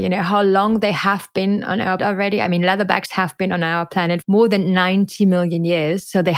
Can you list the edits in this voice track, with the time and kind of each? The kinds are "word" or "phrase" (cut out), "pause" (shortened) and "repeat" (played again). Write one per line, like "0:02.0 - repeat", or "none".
0:02.0 - word
0:04.2 - word